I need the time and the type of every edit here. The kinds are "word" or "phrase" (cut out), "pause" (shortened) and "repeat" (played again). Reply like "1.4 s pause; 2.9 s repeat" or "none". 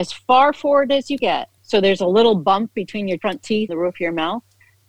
1.2 s word; 1.5 s pause; 3.2 s word; 3.7 s word